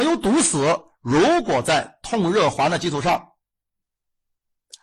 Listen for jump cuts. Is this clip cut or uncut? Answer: uncut